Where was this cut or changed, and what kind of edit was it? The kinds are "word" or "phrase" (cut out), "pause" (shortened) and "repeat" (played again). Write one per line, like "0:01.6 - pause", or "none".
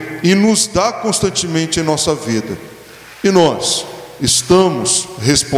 none